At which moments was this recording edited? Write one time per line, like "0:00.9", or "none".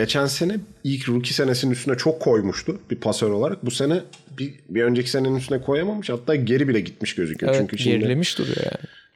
none